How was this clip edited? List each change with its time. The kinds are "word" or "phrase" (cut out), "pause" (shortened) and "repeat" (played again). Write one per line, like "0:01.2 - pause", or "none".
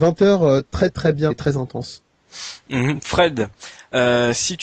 0:01.3 - word